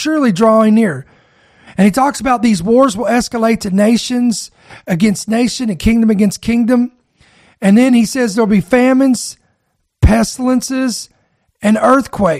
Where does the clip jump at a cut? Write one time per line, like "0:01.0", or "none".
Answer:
none